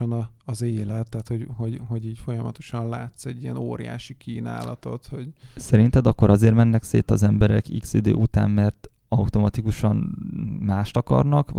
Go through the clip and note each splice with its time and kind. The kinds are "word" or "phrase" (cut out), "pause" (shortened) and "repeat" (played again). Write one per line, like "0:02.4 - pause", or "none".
none